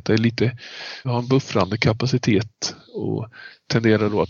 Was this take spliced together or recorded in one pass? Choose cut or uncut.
cut